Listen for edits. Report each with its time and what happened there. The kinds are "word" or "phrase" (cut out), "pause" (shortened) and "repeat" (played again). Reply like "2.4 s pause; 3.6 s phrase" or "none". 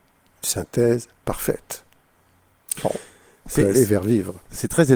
none